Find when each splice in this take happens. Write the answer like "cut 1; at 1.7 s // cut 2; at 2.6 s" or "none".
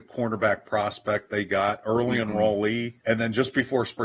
cut 1; at 1.3 s // cut 2; at 3.0 s